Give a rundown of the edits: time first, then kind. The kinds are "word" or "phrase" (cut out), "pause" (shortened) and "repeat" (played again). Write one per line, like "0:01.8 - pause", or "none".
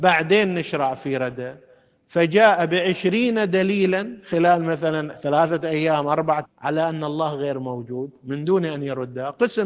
0:06.5 - word